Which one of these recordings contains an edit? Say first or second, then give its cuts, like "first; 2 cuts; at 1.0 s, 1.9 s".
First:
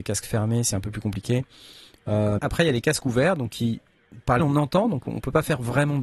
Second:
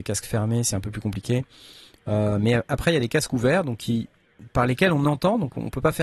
first; 2 cuts; at 2.4 s, 4.4 s